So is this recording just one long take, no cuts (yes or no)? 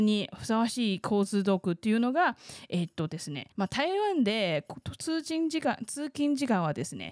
no